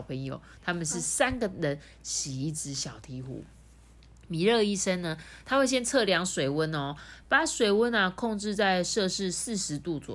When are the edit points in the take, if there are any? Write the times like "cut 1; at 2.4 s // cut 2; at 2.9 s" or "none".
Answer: none